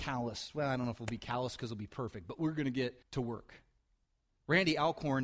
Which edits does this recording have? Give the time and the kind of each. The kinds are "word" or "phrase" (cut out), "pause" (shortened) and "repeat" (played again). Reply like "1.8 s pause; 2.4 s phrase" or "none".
3.0 s pause